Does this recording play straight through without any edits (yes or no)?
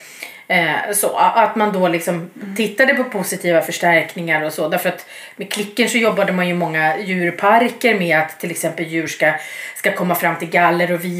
yes